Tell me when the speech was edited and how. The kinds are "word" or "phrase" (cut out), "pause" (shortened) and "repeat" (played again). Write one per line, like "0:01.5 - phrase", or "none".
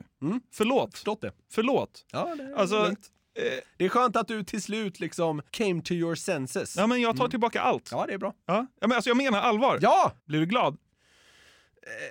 0:05.5 - pause
0:10.2 - pause